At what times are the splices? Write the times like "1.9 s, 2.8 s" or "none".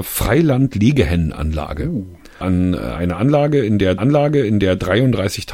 2.4 s, 4.0 s